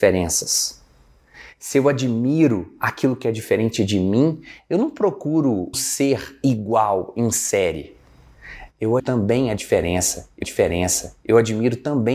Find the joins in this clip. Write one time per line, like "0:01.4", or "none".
0:05.7
0:09.0
0:10.4